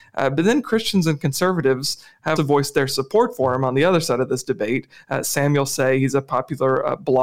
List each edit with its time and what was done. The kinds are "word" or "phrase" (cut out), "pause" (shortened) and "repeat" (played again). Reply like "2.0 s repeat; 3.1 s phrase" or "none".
2.4 s word

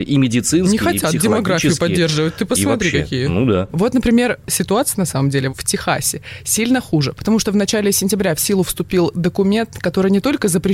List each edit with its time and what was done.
5.5 s word

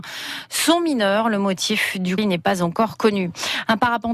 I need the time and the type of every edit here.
2.2 s word

